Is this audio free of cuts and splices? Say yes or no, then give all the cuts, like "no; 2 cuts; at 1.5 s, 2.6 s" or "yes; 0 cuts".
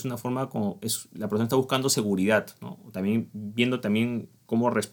yes; 0 cuts